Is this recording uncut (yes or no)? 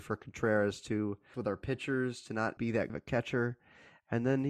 no